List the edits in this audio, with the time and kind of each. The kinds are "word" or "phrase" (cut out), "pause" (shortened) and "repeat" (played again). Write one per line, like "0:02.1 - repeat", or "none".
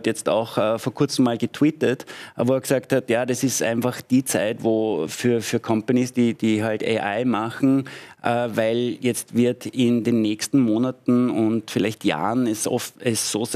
none